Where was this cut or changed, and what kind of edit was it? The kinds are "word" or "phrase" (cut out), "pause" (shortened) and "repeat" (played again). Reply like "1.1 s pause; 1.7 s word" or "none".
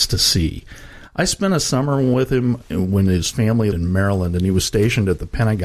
2.6 s word; 3.7 s word